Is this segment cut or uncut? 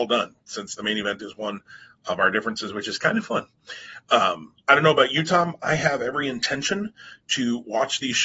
uncut